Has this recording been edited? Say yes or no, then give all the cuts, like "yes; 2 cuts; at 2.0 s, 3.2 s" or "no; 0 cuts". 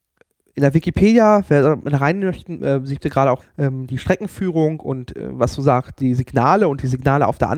yes; 2 cuts; at 3.0 s, 3.4 s